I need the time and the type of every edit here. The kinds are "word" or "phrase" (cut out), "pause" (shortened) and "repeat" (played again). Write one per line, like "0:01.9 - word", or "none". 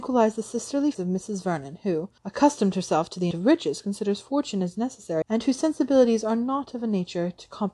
0:00.9 - word
0:02.2 - pause
0:03.3 - word
0:05.2 - word